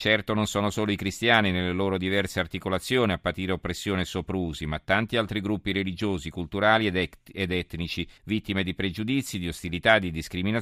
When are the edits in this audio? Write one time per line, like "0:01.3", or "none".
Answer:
0:08.2